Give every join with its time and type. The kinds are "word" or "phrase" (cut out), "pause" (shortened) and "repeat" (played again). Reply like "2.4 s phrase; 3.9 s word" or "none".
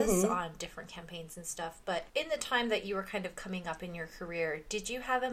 2.1 s pause